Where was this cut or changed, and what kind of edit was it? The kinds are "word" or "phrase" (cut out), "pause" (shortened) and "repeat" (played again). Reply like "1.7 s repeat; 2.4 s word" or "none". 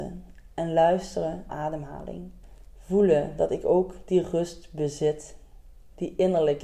1.5 s phrase; 2.4 s pause